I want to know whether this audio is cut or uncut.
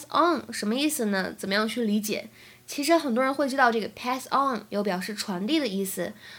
uncut